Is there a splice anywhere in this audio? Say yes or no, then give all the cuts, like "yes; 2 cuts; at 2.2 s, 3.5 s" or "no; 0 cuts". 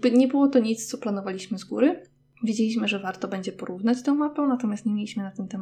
no; 0 cuts